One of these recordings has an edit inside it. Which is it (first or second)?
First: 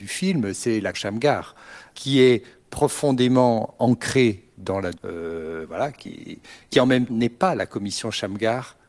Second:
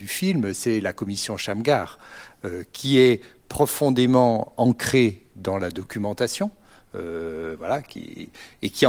first